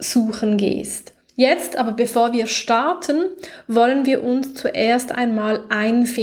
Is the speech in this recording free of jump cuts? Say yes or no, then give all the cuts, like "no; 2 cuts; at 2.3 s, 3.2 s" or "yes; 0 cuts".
no; 1 cut; at 1.3 s